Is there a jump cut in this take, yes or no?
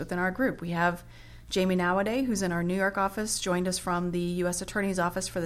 no